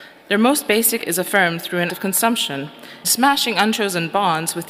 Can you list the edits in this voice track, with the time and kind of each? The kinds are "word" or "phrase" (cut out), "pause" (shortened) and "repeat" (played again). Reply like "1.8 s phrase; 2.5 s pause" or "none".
1.0 s word; 1.9 s word; 3.0 s word